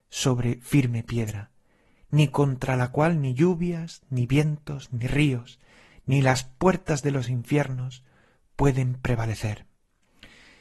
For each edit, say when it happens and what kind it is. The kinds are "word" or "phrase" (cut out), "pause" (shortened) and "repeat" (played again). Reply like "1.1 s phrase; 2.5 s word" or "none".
none